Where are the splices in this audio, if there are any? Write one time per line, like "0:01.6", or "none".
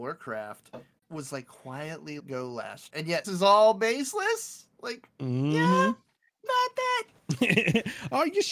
0:01.0
0:02.2
0:02.9
0:03.2
0:06.5